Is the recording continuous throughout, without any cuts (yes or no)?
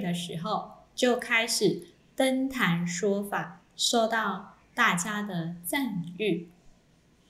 yes